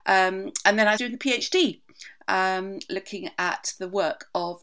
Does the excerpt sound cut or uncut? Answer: cut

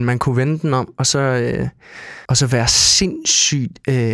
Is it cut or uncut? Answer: cut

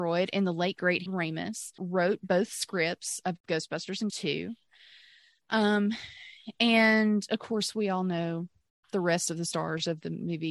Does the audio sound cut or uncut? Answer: cut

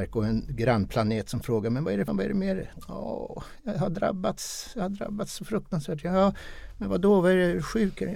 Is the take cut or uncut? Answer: cut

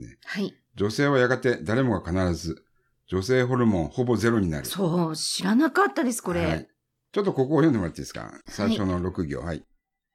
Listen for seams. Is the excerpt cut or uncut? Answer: uncut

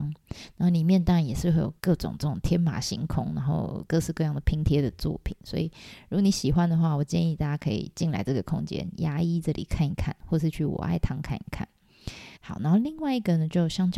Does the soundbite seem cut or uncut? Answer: cut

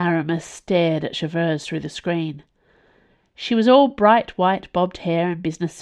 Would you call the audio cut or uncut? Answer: uncut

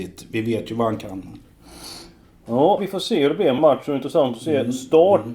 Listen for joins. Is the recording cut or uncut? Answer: cut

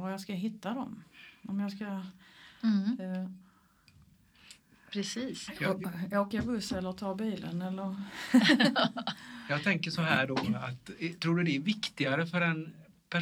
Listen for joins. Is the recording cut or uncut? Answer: uncut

